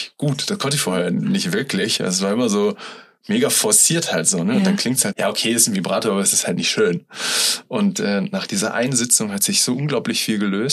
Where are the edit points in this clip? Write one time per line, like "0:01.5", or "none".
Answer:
0:05.1